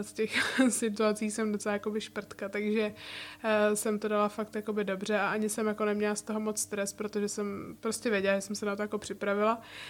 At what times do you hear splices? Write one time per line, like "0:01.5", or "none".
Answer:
none